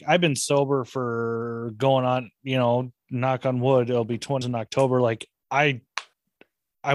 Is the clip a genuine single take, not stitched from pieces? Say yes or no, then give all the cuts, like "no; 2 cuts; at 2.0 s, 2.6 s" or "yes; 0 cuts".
no; 1 cut; at 4.4 s